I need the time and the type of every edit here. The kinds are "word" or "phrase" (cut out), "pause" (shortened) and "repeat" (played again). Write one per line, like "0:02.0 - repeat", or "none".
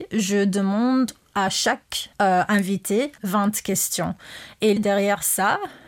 0:02.1 - pause
0:03.2 - phrase
0:04.8 - word